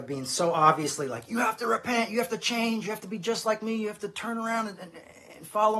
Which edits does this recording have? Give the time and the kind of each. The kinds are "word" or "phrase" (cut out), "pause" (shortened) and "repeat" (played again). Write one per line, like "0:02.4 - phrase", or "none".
none